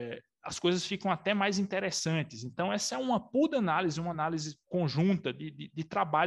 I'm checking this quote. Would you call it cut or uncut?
uncut